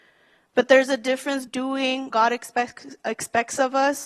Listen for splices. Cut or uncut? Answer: cut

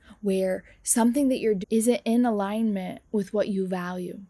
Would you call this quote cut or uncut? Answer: cut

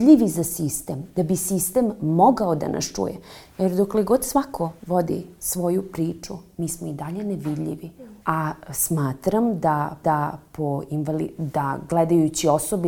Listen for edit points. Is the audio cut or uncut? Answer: cut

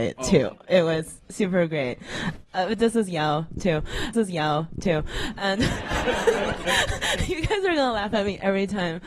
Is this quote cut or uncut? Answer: cut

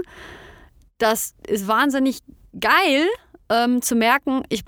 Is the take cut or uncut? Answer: uncut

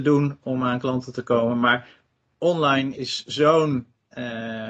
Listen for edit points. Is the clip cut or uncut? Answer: cut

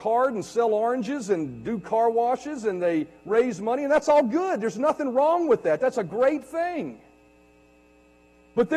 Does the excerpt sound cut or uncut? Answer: uncut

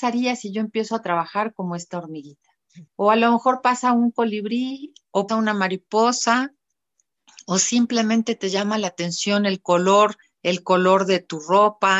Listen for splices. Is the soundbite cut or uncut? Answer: cut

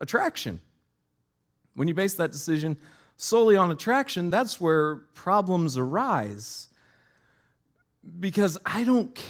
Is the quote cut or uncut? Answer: uncut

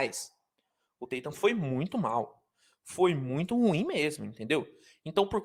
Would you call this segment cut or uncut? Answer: uncut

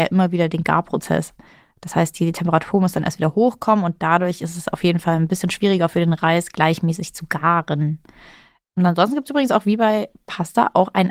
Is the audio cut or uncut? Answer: uncut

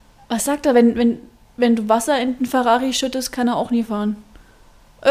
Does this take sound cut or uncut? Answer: uncut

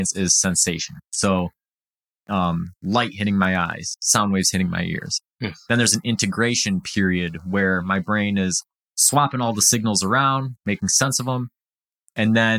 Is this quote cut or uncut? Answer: uncut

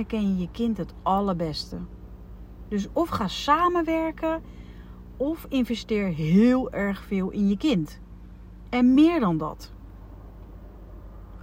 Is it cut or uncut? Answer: uncut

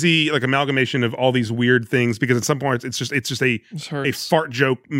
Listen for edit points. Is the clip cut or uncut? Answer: uncut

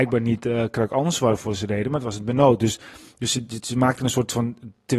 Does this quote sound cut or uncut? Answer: uncut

